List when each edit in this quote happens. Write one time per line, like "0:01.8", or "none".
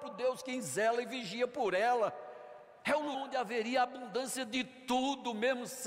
0:03.1